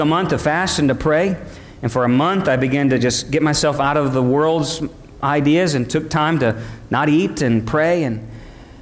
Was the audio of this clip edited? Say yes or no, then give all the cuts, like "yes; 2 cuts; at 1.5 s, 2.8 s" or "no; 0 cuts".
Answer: no; 0 cuts